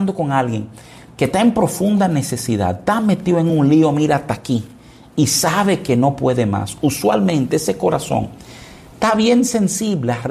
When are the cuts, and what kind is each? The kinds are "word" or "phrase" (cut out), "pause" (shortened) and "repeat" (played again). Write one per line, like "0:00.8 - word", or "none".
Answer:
none